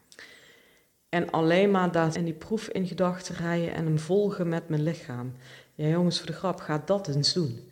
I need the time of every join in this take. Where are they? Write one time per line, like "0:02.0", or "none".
0:02.1

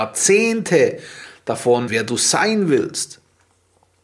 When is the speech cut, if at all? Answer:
0:01.9

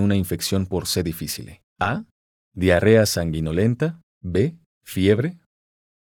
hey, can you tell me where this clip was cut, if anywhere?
0:01.7
0:04.1

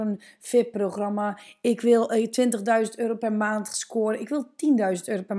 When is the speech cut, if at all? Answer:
none

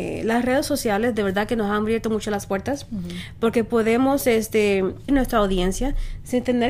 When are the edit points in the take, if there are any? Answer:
0:05.1

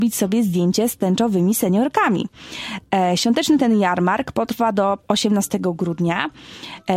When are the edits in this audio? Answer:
none

